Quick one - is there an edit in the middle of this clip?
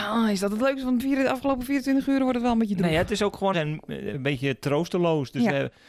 yes; 3 cuts; at 1.0 s, 3.5 s, 4.1 s

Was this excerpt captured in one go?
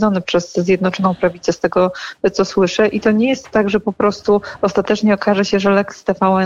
yes; 0 cuts

